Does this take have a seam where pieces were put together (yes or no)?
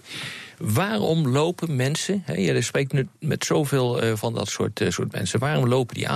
no